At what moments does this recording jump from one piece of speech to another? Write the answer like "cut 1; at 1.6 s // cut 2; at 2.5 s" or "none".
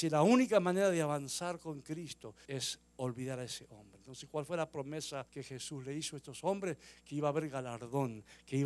cut 1; at 2.4 s // cut 2; at 5.3 s